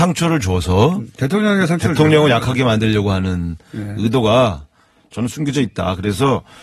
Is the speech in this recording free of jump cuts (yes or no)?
yes